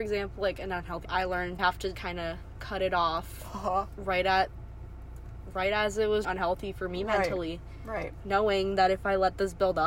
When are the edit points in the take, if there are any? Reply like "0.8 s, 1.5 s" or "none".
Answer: 1.0 s, 1.6 s, 1.9 s, 6.2 s